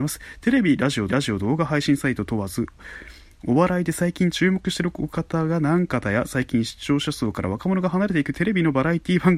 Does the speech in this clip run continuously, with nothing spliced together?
no; 1 cut; at 1.1 s

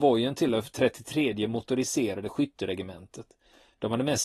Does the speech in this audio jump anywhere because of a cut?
no; 0 cuts

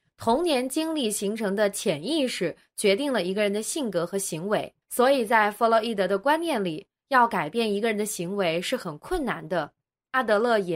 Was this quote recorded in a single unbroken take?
no; 1 cut; at 4.8 s

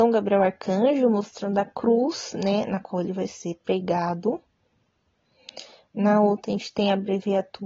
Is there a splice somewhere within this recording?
no; 0 cuts

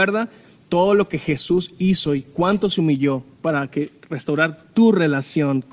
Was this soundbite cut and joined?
no; 0 cuts

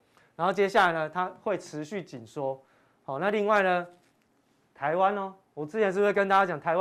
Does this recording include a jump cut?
no; 0 cuts

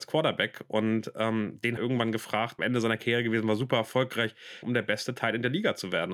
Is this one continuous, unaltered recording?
no; 3 cuts; at 1.8 s, 2.6 s, 4.6 s

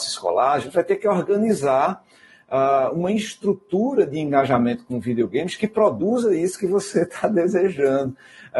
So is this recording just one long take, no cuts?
yes; 0 cuts

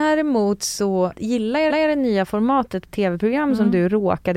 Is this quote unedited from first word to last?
no; 3 cuts; at 1.1 s, 1.7 s, 2.9 s

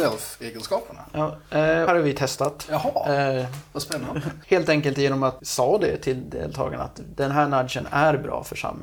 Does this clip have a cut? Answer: yes; 3 cuts; at 1.9 s, 4.4 s, 5.4 s

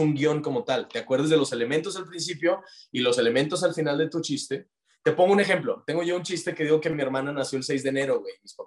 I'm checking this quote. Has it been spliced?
no; 0 cuts

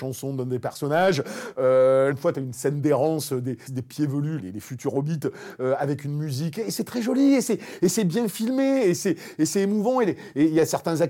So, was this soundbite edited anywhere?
yes; 3 cuts; at 2.1 s, 3.7 s, 4.4 s

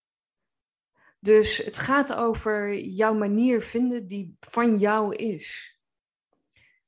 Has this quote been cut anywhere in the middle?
no; 0 cuts

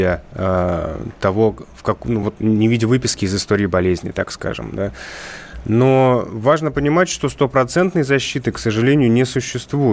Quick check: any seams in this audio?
no; 0 cuts

